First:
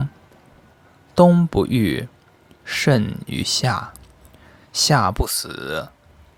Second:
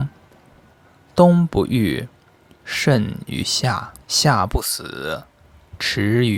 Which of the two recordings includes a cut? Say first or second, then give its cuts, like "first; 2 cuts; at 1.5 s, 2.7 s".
second; 1 cut; at 4.0 s